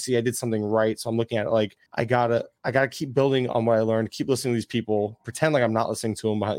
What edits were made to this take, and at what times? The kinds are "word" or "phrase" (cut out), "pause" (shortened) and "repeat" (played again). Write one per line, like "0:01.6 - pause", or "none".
0:01.9 - pause